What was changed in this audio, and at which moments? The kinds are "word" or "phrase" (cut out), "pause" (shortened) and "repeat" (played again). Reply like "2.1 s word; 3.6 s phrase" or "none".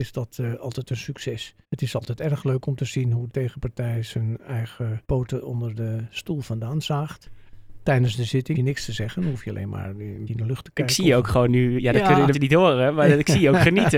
1.6 s pause; 3.3 s word; 5.0 s pause; 8.5 s phrase; 10.3 s word; 12.3 s word